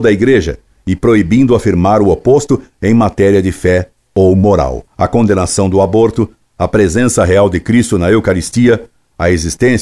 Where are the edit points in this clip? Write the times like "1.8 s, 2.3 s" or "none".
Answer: 4.9 s